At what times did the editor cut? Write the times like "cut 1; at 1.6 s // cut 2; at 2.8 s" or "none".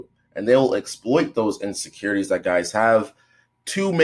none